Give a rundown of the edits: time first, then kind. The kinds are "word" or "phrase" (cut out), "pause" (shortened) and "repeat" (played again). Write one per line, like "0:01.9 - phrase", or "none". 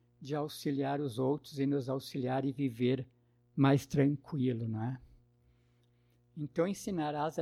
none